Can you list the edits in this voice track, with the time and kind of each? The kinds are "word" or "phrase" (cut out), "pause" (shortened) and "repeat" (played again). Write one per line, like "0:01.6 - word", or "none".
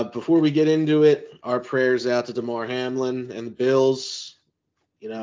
none